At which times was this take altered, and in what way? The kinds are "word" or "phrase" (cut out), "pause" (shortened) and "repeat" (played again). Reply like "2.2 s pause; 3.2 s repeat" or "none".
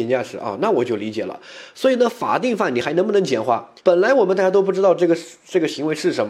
3.8 s pause